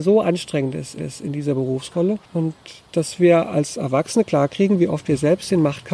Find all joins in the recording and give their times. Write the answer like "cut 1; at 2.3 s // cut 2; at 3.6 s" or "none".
cut 1; at 1.0 s // cut 2; at 2.2 s